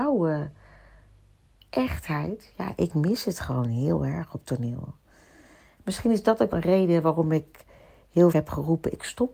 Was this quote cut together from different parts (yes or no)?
yes